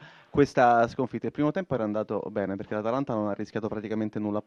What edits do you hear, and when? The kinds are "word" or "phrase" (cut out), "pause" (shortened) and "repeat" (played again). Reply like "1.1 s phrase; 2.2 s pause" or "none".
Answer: none